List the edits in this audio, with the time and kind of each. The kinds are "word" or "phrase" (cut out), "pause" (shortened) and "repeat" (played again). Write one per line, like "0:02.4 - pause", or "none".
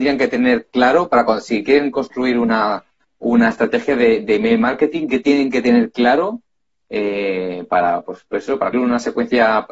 0:08.7 - word